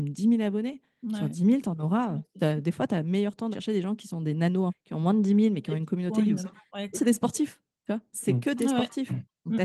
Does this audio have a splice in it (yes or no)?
yes